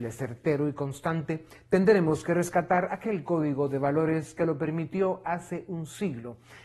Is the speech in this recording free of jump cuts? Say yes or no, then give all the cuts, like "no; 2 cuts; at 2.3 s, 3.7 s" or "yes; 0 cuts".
yes; 0 cuts